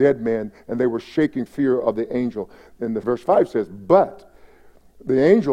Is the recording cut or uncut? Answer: cut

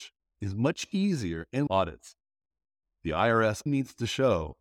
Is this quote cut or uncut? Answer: cut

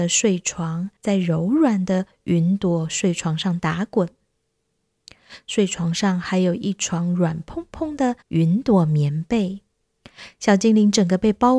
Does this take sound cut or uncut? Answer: cut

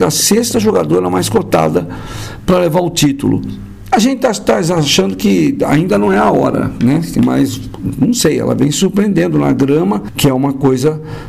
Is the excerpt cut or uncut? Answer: uncut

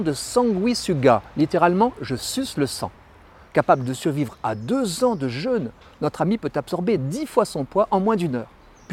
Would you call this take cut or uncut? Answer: uncut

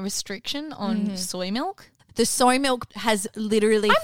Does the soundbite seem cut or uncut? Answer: uncut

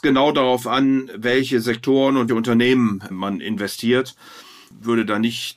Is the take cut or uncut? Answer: cut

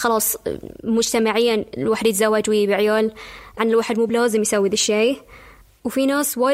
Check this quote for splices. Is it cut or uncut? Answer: cut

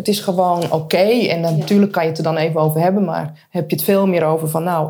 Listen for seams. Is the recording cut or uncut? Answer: uncut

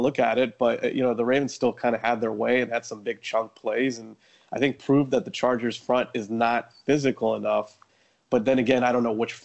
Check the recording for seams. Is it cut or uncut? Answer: uncut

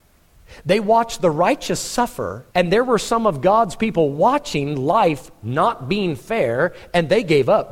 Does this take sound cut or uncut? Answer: cut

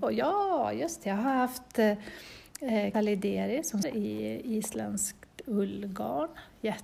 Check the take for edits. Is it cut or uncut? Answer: cut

